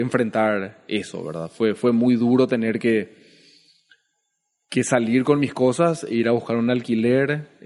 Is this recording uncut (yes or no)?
yes